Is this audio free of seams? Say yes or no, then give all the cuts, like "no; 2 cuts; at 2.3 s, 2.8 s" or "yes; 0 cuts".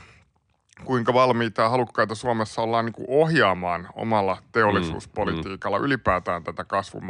yes; 0 cuts